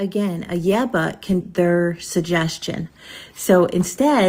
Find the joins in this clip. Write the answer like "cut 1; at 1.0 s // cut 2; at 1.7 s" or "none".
cut 1; at 1.4 s